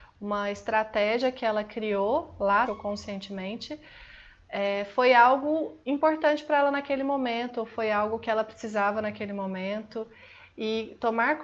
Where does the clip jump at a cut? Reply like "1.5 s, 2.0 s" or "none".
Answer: 2.6 s, 5.8 s

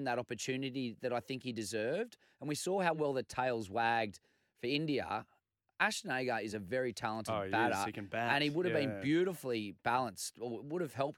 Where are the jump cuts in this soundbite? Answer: none

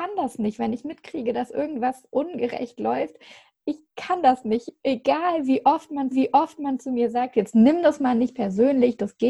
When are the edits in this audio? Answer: 6.1 s

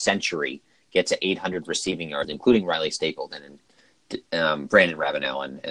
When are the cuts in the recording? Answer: none

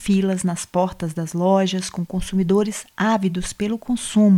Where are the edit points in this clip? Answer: none

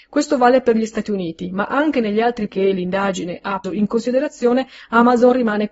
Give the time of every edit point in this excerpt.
2.5 s, 3.6 s

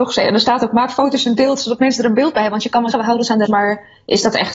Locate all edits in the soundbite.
2.9 s, 3.5 s

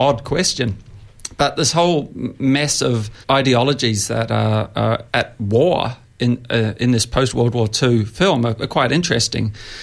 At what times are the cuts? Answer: 3.2 s, 5.1 s

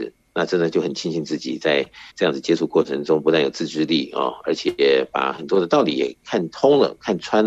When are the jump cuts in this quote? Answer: 2.1 s

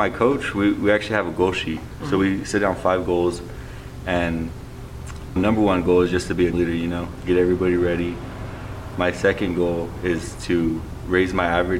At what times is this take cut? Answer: 5.4 s, 6.5 s

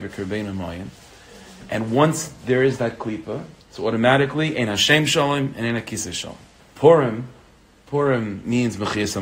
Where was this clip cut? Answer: 3.6 s, 6.6 s

